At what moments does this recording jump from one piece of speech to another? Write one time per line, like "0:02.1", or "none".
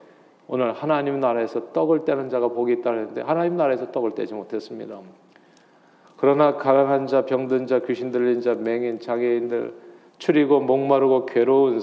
none